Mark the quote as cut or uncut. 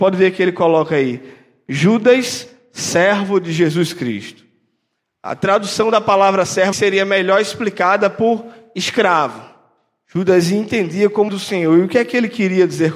cut